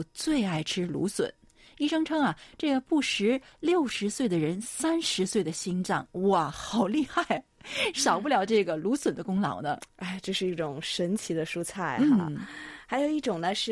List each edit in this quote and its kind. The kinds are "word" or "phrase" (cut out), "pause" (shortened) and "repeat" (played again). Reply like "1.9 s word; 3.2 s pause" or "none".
none